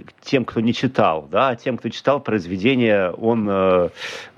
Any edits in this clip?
no; 0 cuts

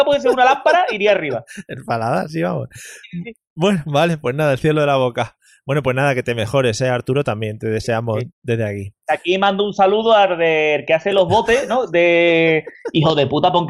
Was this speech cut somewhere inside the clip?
yes; 1 cut; at 2.3 s

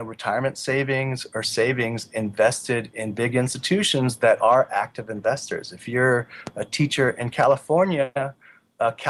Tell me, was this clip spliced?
no; 0 cuts

